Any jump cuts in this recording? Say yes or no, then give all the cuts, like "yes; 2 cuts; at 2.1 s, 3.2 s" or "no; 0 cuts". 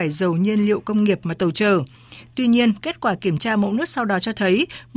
no; 0 cuts